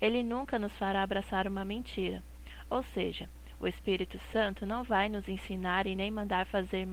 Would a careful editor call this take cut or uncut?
uncut